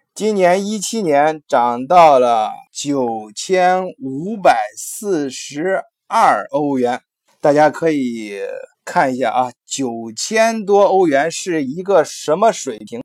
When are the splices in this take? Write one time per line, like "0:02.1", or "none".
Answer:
0:02.7
0:07.3
0:08.7